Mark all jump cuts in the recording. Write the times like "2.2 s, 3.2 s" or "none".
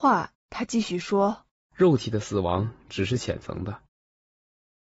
1.6 s